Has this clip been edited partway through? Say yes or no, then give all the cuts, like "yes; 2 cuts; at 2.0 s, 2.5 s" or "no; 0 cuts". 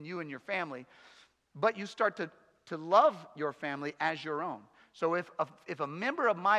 no; 0 cuts